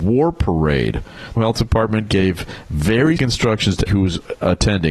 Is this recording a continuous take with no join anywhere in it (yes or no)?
no